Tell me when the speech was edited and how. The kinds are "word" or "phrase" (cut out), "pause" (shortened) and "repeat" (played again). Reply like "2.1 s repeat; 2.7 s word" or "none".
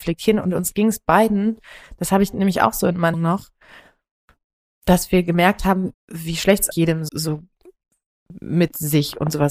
3.1 s word; 5.9 s word; 6.7 s word; 7.1 s word